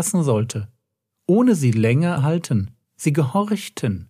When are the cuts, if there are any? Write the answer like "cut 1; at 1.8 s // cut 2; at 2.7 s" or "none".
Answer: cut 1; at 2.2 s // cut 2; at 2.8 s